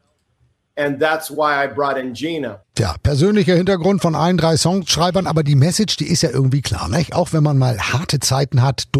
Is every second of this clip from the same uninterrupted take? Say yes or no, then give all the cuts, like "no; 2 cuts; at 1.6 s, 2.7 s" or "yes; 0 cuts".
yes; 0 cuts